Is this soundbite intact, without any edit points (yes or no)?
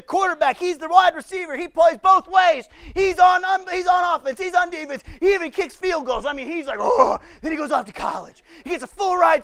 yes